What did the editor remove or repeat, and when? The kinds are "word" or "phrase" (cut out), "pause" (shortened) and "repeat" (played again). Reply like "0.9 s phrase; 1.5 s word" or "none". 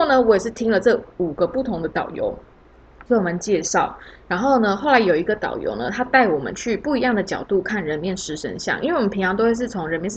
3.1 s pause